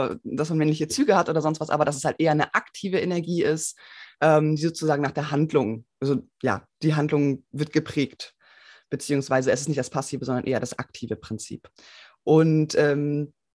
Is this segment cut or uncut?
uncut